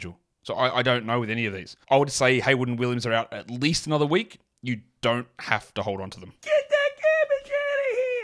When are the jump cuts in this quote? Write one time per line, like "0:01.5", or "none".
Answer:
0:01.8
0:06.4

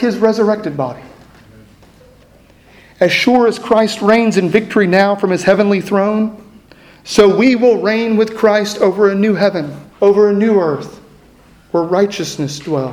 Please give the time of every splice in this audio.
0:06.6
0:09.9

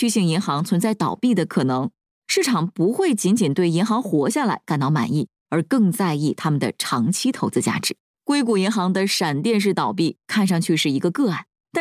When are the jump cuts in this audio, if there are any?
0:08.0

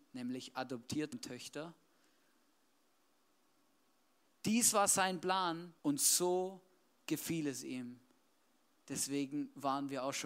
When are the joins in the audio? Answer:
0:01.1
0:05.8

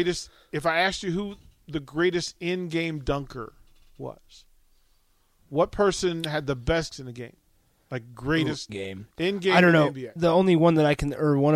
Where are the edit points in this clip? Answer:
0:06.9
0:08.7
0:10.2

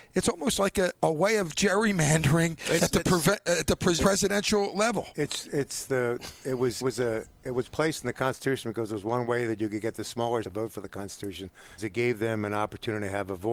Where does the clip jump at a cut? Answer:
0:00.9
0:02.8
0:04.0
0:06.8
0:10.4
0:11.8

